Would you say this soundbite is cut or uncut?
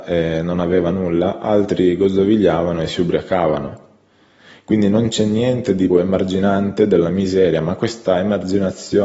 cut